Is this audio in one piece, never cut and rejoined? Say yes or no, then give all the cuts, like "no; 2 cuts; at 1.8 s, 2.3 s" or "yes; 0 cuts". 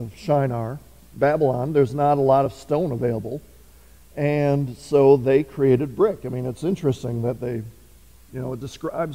yes; 0 cuts